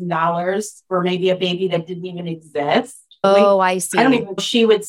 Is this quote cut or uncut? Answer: uncut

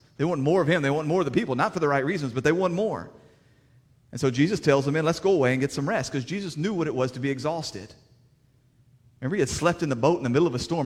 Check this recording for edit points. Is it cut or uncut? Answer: uncut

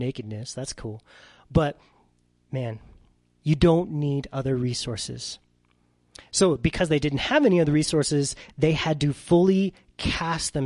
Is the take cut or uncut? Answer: uncut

